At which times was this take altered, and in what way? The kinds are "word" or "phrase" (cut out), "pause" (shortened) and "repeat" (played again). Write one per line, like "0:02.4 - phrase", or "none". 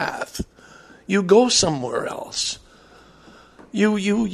none